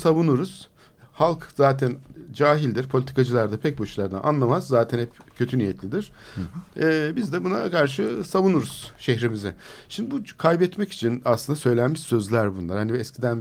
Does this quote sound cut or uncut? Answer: uncut